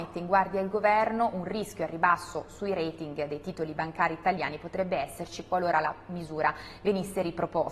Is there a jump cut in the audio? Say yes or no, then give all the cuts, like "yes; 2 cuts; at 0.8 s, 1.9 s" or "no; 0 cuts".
no; 0 cuts